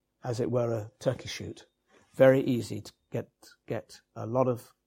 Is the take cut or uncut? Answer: uncut